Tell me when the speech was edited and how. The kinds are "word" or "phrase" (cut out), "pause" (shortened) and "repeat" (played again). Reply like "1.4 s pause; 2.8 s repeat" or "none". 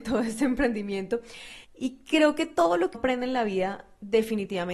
1.6 s pause; 2.9 s word